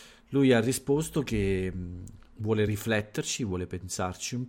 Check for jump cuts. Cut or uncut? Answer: uncut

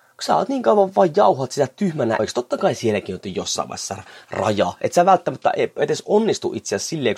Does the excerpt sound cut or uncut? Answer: cut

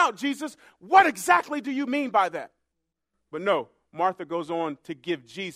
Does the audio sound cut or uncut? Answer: uncut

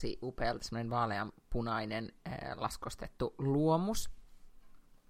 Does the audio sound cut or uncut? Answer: uncut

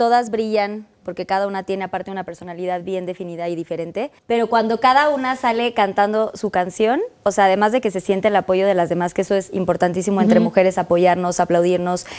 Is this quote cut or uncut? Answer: cut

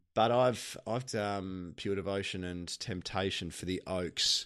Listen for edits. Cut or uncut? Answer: cut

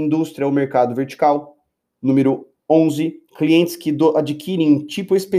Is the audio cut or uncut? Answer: uncut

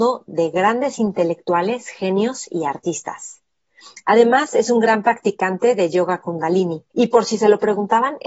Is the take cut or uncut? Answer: cut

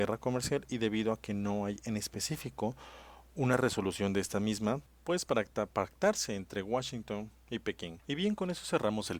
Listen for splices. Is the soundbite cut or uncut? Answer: uncut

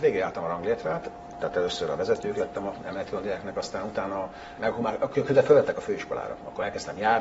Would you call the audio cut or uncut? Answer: uncut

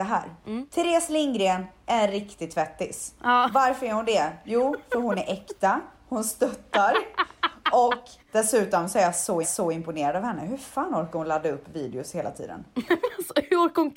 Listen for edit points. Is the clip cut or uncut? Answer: cut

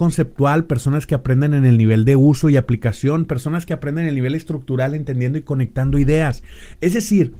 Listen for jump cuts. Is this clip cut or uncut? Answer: uncut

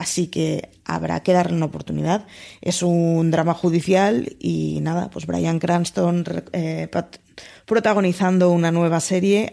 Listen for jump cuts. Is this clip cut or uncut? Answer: uncut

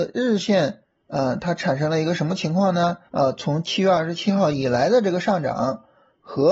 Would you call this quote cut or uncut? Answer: cut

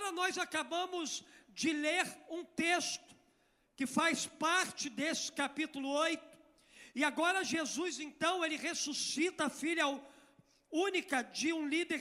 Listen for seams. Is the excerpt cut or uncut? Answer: uncut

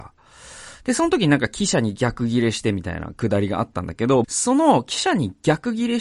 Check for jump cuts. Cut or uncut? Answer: cut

